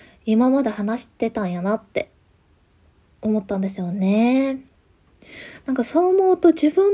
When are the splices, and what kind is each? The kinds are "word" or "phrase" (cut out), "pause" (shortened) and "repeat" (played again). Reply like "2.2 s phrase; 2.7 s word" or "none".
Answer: none